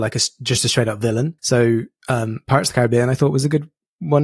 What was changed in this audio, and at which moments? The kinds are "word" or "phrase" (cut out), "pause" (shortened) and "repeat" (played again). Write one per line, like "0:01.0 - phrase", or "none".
0:01.4 - pause